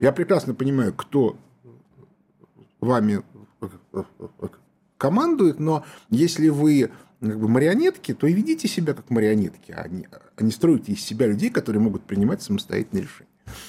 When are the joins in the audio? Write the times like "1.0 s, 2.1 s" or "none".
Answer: none

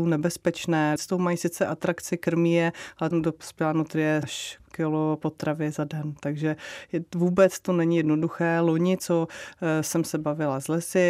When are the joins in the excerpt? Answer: 1.0 s, 3.1 s, 4.2 s, 4.6 s

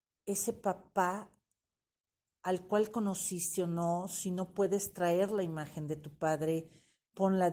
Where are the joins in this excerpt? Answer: none

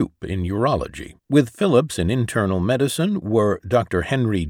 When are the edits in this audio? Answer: 1.2 s

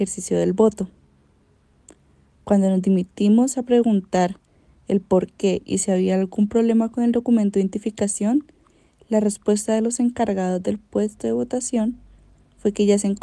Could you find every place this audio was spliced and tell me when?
none

